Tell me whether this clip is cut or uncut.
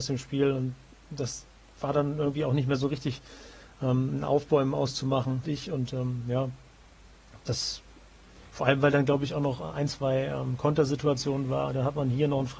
cut